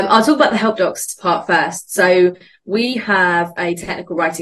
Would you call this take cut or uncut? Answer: uncut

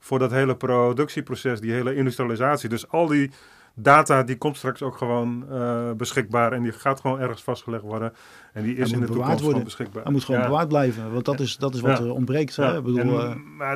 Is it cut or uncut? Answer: uncut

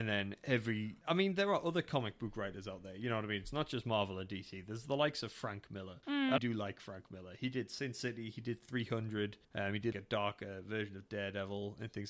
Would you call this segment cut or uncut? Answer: cut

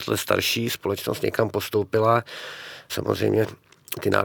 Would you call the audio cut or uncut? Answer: cut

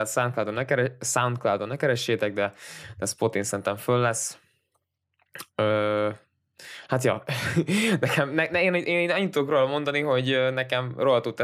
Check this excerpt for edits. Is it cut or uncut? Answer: uncut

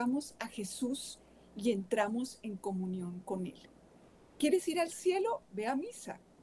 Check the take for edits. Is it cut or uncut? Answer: uncut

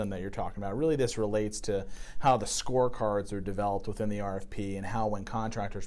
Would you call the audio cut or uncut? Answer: uncut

